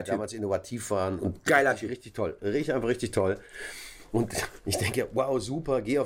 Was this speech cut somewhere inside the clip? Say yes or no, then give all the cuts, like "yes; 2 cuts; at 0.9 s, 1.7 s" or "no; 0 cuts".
yes; 1 cut; at 1.2 s